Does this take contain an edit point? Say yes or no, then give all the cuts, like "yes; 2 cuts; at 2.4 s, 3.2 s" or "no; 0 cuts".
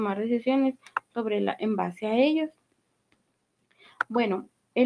no; 0 cuts